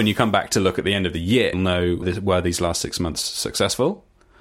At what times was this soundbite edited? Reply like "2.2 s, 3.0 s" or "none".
1.5 s, 2.0 s